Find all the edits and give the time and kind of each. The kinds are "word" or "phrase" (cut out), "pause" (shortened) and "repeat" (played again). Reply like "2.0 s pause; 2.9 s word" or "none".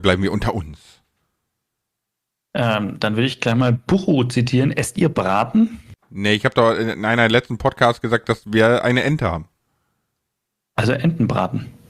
6.0 s pause